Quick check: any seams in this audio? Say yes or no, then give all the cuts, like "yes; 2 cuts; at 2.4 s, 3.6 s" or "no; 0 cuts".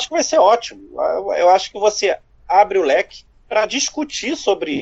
no; 0 cuts